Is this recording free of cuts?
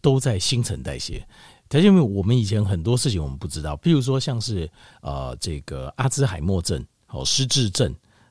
yes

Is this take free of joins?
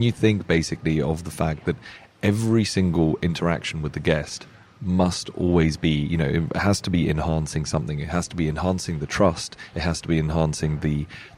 yes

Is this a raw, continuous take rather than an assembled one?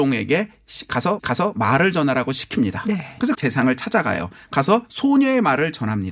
no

